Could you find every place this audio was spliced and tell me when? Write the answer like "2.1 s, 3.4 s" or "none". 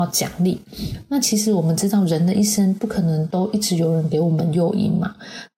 none